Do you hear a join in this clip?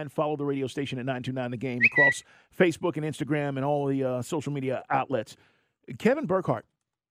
yes; 1 cut; at 2.3 s

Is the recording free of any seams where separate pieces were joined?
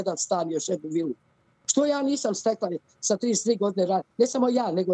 yes; 0 cuts

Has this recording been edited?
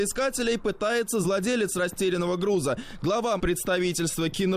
yes; 2 cuts; at 1.2 s, 3.4 s

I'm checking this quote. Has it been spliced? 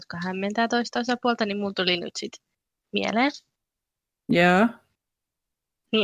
no; 0 cuts

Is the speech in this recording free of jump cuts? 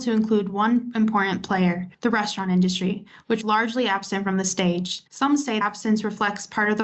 no; 4 cuts; at 1.9 s, 3.4 s, 5.1 s, 5.6 s

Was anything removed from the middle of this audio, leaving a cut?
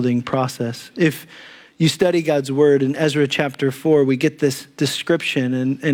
no; 0 cuts

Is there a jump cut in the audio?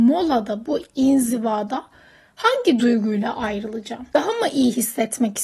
no; 0 cuts

